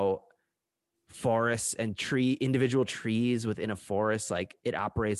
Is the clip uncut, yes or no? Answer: yes